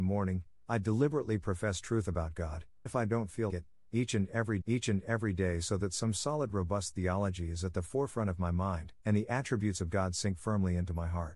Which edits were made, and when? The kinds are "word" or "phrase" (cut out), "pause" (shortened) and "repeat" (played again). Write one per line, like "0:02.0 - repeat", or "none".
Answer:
0:02.9 - word
0:03.5 - word
0:04.6 - repeat
0:09.0 - pause